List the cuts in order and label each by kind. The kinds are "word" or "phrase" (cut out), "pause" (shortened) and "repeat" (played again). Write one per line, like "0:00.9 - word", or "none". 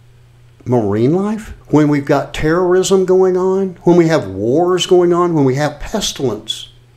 0:01.6 - pause